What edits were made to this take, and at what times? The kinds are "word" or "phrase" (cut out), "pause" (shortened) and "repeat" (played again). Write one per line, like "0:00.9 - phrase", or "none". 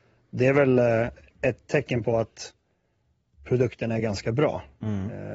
none